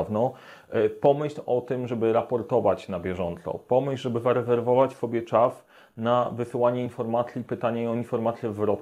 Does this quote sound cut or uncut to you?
uncut